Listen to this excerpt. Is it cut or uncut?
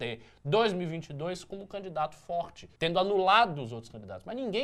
cut